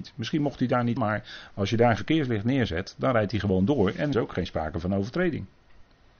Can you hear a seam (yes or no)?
yes